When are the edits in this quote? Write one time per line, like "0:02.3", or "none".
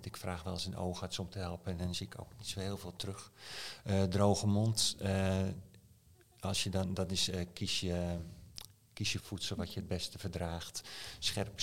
0:07.0
0:09.2